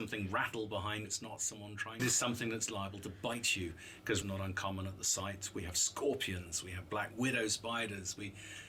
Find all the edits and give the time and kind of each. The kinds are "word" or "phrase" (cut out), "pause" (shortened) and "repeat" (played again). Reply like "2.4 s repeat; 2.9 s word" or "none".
1.0 s word; 2.0 s phrase; 4.2 s word